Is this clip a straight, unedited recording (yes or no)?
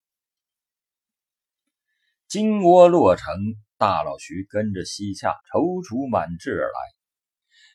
no